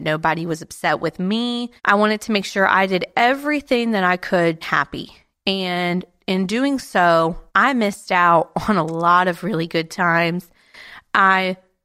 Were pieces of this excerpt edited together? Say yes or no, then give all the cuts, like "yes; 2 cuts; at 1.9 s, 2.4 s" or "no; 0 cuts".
yes; 3 cuts; at 1.8 s, 4.6 s, 7.5 s